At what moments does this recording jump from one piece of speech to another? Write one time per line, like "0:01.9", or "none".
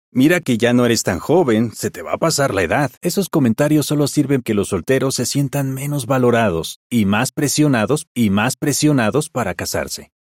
0:03.0
0:04.4
0:08.1